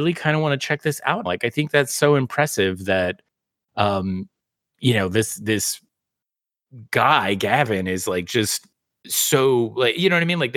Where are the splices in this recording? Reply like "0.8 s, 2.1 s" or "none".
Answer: 1.3 s